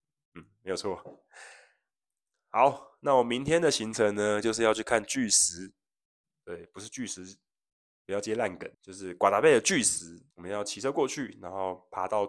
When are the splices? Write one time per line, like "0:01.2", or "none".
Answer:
0:08.7
0:10.3